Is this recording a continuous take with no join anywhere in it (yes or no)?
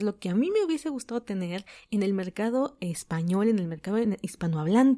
yes